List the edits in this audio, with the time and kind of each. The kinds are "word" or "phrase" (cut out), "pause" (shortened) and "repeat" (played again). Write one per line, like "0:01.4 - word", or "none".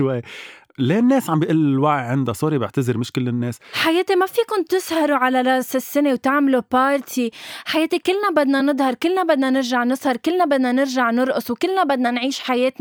none